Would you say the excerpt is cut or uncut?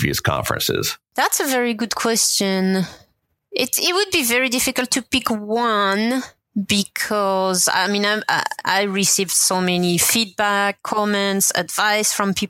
uncut